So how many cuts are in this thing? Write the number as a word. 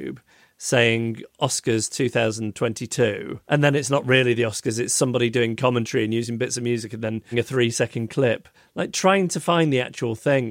three